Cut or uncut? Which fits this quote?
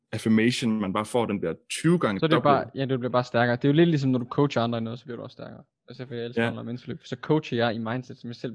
uncut